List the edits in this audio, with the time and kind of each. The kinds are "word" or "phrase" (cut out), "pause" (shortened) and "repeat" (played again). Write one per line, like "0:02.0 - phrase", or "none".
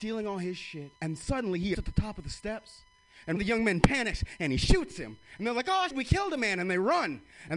0:01.0 - pause
0:01.7 - word
0:03.4 - word
0:05.9 - word